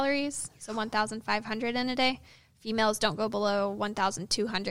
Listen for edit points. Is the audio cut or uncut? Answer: uncut